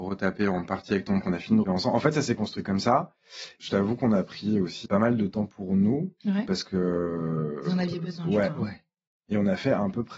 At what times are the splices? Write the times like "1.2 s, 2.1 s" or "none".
1.2 s, 1.6 s, 4.9 s